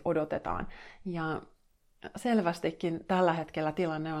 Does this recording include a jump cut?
no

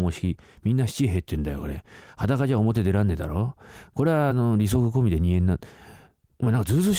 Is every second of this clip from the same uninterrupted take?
yes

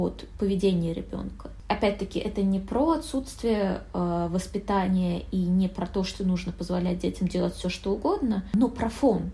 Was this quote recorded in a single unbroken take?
yes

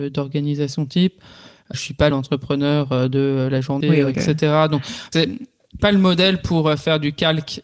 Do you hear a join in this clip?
yes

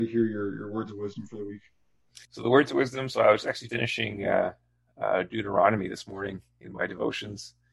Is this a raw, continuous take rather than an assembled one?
no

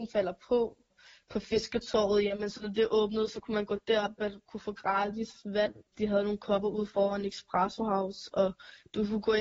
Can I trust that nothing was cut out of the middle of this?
no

